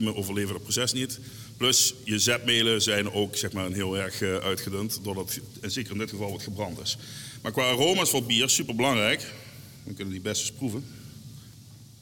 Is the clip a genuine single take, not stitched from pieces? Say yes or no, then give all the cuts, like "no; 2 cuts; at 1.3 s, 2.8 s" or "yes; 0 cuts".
yes; 0 cuts